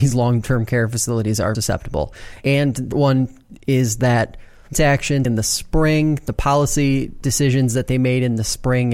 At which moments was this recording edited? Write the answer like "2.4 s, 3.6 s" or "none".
1.5 s, 2.9 s, 4.7 s, 5.2 s